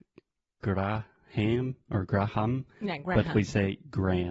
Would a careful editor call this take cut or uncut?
cut